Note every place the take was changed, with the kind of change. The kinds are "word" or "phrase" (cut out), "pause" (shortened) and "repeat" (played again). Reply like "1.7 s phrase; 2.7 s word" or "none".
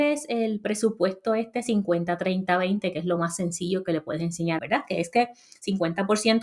4.6 s phrase

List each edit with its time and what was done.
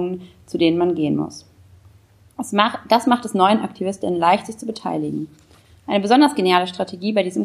none

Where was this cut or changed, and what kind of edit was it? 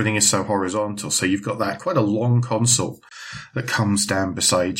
none

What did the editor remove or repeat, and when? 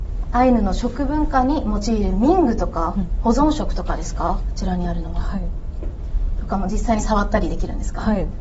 4.4 s word

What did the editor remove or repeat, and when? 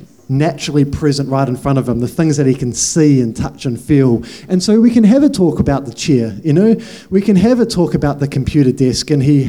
none

